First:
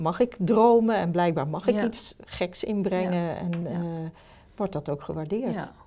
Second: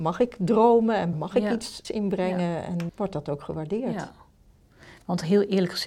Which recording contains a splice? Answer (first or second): second